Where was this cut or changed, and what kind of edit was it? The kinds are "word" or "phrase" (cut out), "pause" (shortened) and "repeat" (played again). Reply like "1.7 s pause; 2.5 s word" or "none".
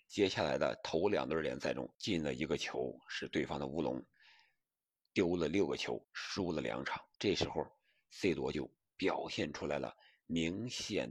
1.9 s pause; 6.0 s pause; 7.2 s pause